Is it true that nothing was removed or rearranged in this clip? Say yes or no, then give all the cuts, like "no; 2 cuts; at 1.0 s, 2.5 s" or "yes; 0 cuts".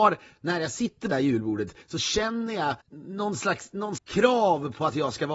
no; 4 cuts; at 1.1 s, 1.8 s, 2.8 s, 4.0 s